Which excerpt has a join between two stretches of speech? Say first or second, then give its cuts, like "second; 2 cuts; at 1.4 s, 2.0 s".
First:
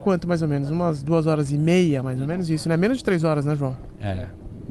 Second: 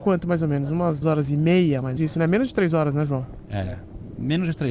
second; 2 cuts; at 1.0 s, 2.0 s